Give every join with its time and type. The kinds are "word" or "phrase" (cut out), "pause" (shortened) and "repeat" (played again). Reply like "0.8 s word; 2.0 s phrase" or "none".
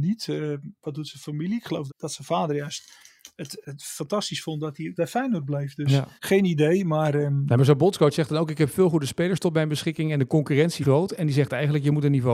1.9 s word; 3.6 s word; 5.0 s phrase; 6.2 s pause; 10.8 s word